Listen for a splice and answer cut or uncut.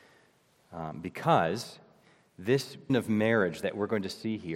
cut